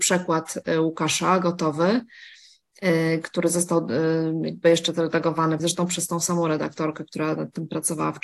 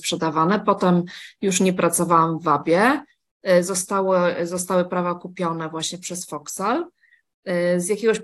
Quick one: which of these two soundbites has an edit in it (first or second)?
first